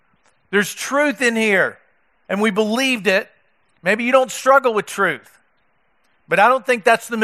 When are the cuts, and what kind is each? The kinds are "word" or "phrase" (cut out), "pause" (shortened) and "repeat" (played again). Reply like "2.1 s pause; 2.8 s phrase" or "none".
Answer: none